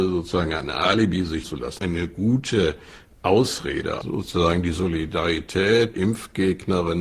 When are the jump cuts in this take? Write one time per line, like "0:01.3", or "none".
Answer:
0:01.4
0:01.8
0:04.0
0:05.9